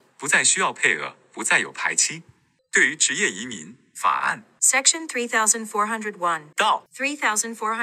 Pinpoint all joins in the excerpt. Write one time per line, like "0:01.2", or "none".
none